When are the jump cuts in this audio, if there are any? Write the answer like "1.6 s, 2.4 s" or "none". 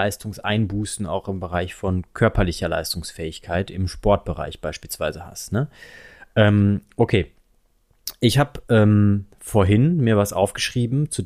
none